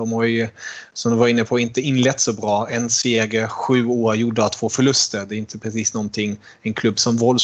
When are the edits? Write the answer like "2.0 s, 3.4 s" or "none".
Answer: none